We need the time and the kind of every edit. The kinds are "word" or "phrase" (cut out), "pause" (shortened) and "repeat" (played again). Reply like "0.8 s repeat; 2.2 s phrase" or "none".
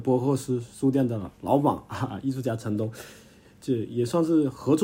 1.3 s pause